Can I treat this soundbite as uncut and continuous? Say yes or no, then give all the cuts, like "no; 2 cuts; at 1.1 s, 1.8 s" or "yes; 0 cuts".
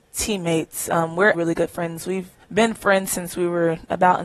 no; 2 cuts; at 1.3 s, 2.4 s